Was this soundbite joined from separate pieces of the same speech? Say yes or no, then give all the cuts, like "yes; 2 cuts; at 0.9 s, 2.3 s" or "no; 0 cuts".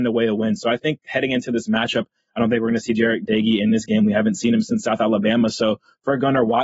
no; 0 cuts